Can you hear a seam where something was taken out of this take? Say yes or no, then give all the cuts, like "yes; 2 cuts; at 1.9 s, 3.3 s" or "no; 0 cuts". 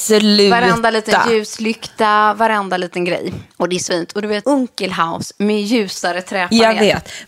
yes; 3 cuts; at 3.5 s, 3.9 s, 4.4 s